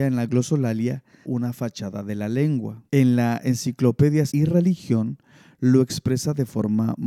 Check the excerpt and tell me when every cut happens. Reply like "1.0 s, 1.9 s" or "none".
1.2 s, 2.9 s, 4.3 s